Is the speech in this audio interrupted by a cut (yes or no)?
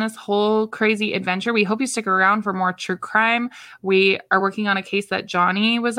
no